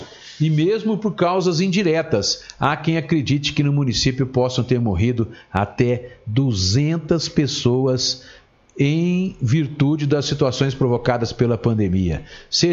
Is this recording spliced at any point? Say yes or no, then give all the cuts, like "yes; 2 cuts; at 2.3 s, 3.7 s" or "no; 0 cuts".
no; 0 cuts